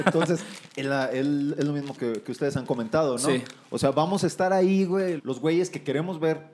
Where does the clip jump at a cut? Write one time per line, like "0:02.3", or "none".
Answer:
0:05.2